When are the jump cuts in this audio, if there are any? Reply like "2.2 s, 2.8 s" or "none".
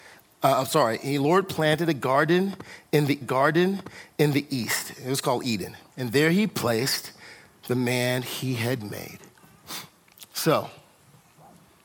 3.2 s, 5.9 s